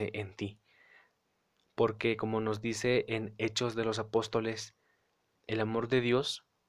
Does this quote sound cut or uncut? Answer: uncut